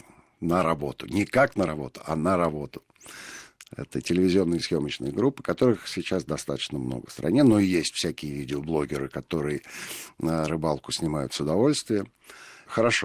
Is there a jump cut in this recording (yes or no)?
no